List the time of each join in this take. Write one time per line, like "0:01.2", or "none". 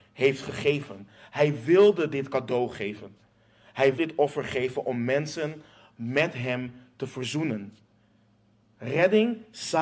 0:04.0